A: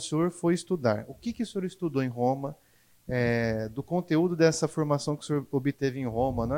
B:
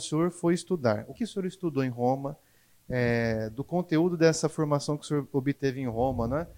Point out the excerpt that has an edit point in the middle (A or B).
B